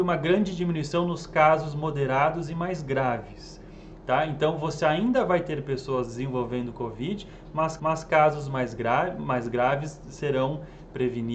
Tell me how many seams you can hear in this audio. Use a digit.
1